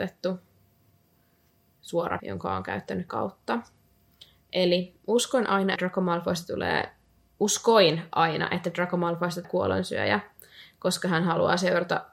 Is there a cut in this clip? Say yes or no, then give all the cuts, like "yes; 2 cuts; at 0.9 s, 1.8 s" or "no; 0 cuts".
yes; 4 cuts; at 2.2 s, 3.1 s, 5.8 s, 9.4 s